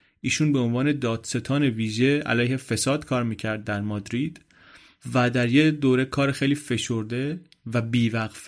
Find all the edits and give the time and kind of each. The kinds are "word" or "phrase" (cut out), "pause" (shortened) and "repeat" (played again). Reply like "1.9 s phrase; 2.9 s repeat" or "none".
none